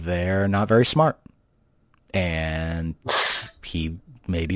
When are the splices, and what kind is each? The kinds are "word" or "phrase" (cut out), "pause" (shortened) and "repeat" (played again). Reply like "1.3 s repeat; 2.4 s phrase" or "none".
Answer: none

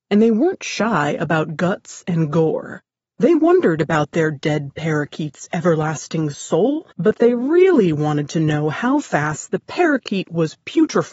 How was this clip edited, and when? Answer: 3.0 s pause; 6.9 s pause

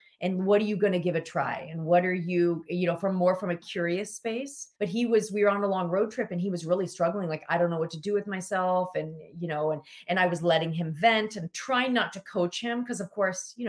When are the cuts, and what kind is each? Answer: 4.7 s pause

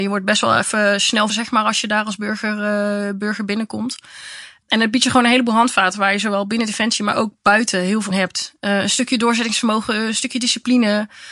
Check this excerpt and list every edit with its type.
1.3 s word; 8.1 s word

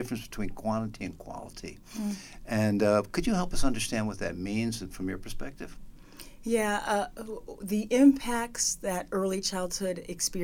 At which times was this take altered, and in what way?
none

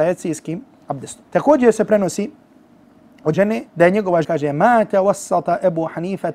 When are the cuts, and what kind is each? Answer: 1.3 s pause; 3.3 s word; 3.7 s pause; 4.2 s phrase

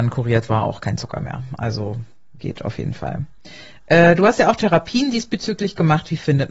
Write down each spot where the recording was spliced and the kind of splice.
none

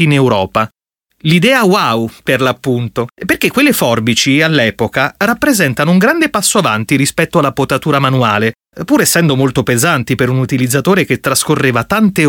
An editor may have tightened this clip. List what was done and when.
3.1 s pause

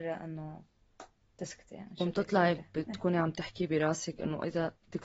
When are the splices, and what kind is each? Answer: none

